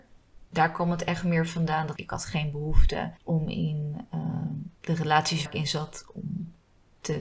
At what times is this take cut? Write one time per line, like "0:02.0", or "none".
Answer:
0:02.0
0:03.2
0:04.7
0:05.5